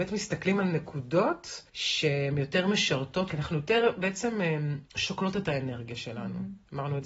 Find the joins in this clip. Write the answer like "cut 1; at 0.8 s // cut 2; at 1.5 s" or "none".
cut 1; at 1.7 s // cut 2; at 3.3 s // cut 3; at 4.9 s

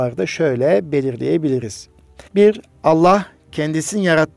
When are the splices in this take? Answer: cut 1; at 2.3 s

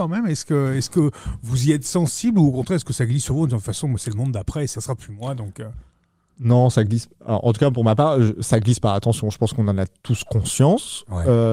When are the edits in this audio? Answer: cut 1; at 4.7 s

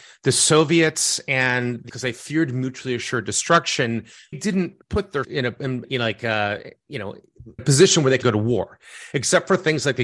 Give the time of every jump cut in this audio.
cut 1; at 1.9 s // cut 2; at 4.3 s // cut 3; at 4.8 s // cut 4; at 5.2 s // cut 5; at 5.8 s // cut 6; at 7.6 s // cut 7; at 8.2 s

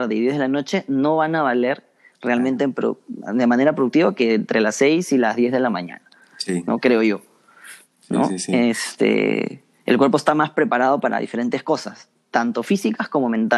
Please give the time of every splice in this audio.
none

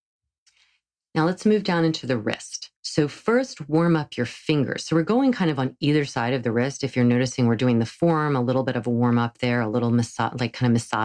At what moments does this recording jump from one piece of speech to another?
cut 1; at 2.7 s

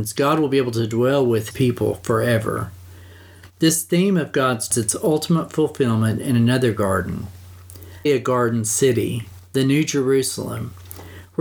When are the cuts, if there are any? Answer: cut 1; at 1.5 s // cut 2; at 4.7 s // cut 3; at 8.0 s

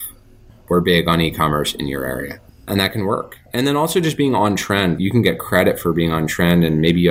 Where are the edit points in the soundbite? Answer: none

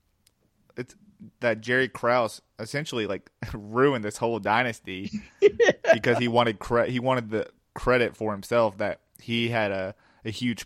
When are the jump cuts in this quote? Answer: none

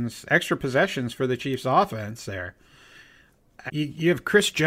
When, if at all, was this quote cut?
cut 1; at 2.3 s // cut 2; at 3.7 s

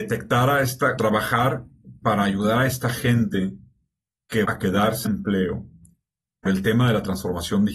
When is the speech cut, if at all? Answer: cut 1; at 1.0 s // cut 2; at 2.0 s // cut 3; at 4.4 s // cut 4; at 5.0 s // cut 5; at 6.5 s

